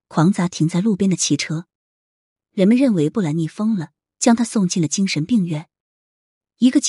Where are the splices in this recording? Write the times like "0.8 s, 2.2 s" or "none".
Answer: none